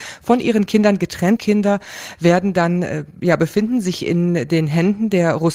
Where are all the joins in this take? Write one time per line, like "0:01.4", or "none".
0:01.4